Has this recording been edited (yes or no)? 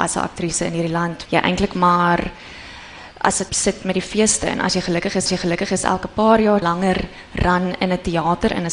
yes